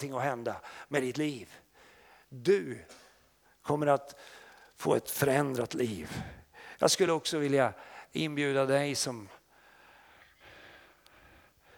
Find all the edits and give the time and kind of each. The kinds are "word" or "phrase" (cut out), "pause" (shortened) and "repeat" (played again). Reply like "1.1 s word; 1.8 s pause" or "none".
none